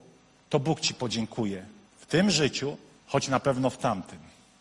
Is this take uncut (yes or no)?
no